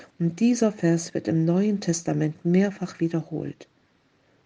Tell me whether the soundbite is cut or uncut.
uncut